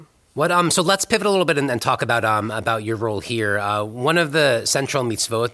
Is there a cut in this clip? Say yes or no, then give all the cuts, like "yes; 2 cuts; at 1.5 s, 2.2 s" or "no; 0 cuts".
no; 0 cuts